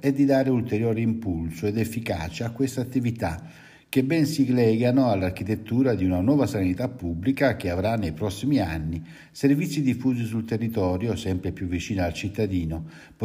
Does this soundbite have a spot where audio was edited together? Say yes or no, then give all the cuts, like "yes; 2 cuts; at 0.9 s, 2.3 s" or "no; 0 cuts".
no; 0 cuts